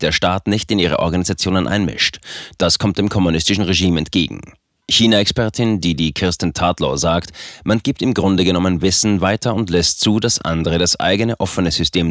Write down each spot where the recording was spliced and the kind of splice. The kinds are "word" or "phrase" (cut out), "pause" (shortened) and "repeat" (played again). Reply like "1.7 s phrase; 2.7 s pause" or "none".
none